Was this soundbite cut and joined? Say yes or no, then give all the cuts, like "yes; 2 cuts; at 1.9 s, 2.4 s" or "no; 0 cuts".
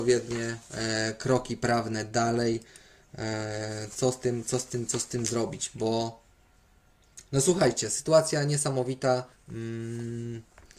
yes; 1 cut; at 9.3 s